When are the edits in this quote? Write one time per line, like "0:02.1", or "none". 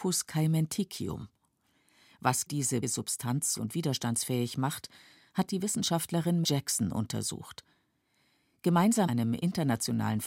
0:02.5
0:02.8
0:03.6
0:06.4
0:09.1